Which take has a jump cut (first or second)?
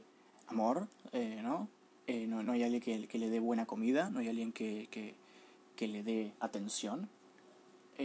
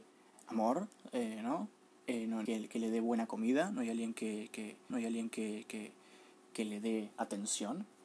second